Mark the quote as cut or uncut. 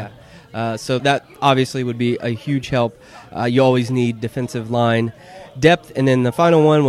cut